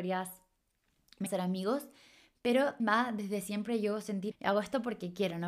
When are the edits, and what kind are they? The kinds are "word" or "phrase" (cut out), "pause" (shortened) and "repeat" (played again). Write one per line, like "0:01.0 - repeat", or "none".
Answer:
0:01.3 - word
0:02.8 - word
0:04.3 - word